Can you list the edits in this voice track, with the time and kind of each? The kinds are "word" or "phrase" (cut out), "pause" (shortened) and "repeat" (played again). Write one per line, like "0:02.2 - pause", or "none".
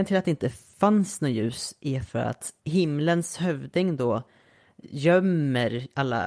0:02.6 - pause